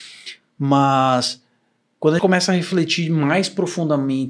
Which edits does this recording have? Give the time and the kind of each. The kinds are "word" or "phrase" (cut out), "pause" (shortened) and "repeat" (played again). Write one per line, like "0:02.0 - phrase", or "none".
0:02.2 - word